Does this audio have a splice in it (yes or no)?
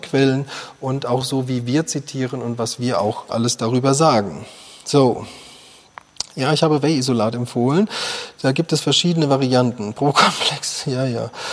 no